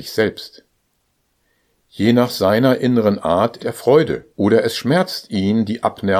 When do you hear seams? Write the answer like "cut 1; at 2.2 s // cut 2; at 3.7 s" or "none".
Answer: cut 1; at 3.6 s // cut 2; at 4.3 s